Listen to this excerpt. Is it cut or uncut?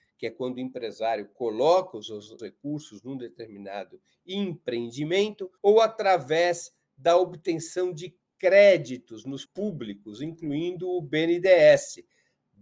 cut